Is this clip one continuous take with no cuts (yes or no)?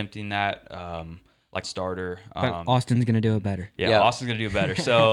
no